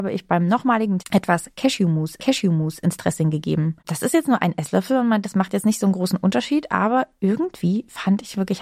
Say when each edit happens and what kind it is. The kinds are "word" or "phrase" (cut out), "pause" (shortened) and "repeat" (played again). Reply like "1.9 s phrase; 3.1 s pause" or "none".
1.0 s word; 2.2 s repeat; 3.8 s pause; 5.2 s word